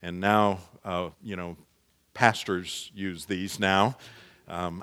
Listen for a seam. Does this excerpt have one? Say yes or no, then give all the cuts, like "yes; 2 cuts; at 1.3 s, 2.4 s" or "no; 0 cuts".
yes; 1 cut; at 1.1 s